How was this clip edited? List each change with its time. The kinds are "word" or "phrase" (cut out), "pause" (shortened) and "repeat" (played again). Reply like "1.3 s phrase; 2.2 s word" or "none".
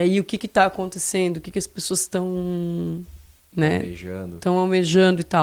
none